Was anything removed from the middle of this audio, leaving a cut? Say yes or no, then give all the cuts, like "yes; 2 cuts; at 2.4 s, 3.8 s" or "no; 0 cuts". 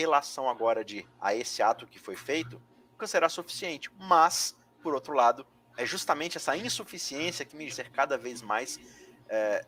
yes; 4 cuts; at 1.0 s, 3.0 s, 5.5 s, 7.7 s